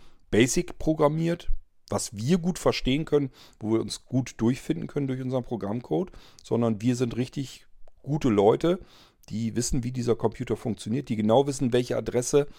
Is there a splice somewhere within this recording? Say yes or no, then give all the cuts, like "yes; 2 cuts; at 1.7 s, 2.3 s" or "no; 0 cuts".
no; 0 cuts